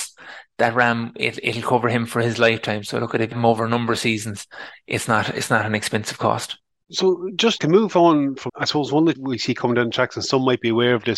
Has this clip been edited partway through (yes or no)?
yes